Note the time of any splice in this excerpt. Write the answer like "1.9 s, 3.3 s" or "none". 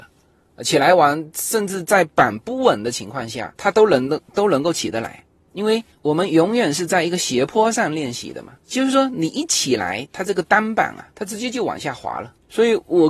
3.6 s, 11.1 s